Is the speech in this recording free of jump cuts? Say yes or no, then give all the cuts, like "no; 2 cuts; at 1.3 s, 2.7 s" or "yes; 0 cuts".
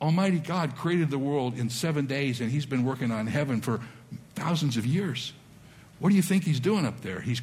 yes; 0 cuts